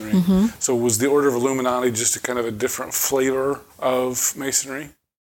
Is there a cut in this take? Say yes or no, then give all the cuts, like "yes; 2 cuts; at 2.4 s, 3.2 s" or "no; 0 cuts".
yes; 1 cut; at 3.7 s